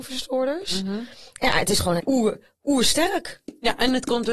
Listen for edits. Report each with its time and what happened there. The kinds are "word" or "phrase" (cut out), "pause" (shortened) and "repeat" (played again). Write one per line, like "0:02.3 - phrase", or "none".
0:02.0 - word